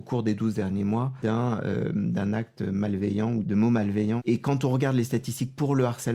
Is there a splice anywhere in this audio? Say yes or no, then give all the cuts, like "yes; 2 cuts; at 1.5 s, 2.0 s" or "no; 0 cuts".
no; 0 cuts